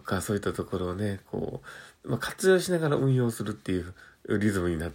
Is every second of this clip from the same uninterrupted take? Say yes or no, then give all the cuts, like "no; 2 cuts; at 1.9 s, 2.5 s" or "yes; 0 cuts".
no; 1 cut; at 2.0 s